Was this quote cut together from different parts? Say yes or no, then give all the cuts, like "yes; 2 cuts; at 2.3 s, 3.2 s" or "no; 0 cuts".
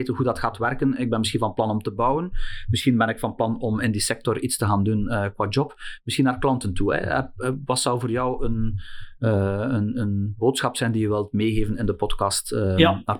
no; 0 cuts